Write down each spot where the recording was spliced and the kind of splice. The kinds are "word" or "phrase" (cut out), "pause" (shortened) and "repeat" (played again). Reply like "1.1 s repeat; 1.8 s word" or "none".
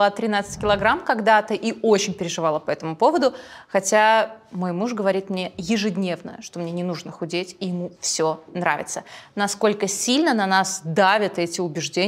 none